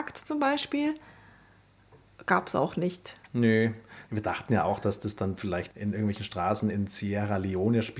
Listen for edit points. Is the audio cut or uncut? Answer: uncut